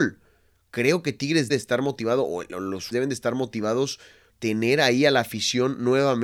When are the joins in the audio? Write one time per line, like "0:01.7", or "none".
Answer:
0:01.5
0:02.9
0:04.3